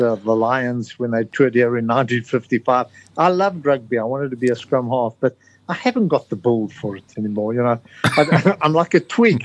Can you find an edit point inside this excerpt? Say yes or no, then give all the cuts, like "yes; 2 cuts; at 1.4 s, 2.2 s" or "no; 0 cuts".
no; 0 cuts